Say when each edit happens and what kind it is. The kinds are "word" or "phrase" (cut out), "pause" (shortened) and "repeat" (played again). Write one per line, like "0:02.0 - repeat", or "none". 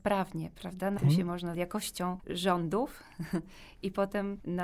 0:01.0 - word
0:01.5 - phrase